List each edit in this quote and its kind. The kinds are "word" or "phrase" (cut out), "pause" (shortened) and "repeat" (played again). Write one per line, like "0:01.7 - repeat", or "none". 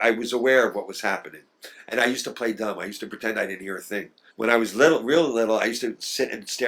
0:04.3 - pause